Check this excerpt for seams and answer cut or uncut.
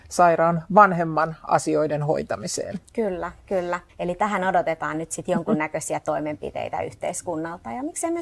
cut